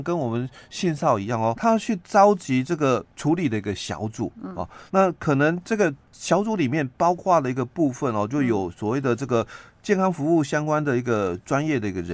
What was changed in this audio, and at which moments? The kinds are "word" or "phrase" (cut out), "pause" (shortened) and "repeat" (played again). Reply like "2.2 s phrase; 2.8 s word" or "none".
1.5 s word; 3.1 s pause; 4.9 s pause; 6.0 s pause

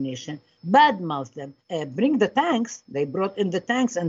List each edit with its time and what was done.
1.6 s pause

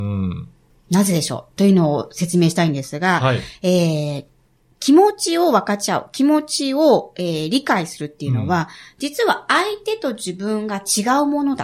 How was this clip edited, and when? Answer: none

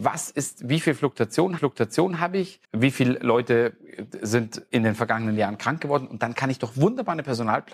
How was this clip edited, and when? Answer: 1.6 s repeat; 2.6 s pause; 4.7 s pause

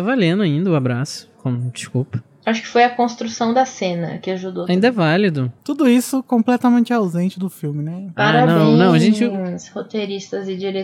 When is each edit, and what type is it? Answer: 5.6 s pause

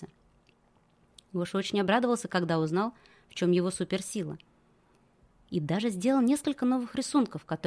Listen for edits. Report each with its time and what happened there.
none

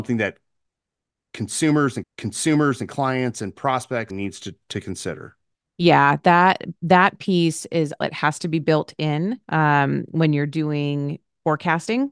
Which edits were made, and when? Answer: 2.0 s repeat; 4.1 s phrase; 5.5 s pause; 8.0 s phrase; 9.4 s pause

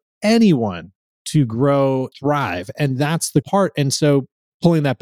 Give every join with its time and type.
2.1 s word; 3.4 s word

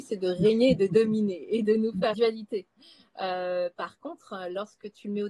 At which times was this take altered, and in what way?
2.1 s phrase

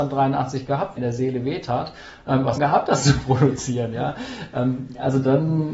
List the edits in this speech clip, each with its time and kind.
1.0 s phrase; 2.6 s phrase

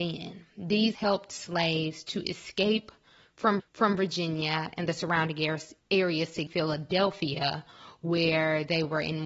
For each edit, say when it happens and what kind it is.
0.9 s word; 3.6 s repeat; 5.8 s pause; 6.5 s phrase

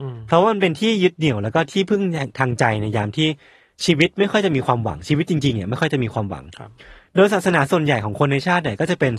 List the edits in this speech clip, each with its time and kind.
none

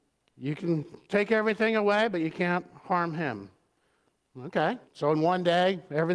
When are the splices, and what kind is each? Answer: 4.9 s pause

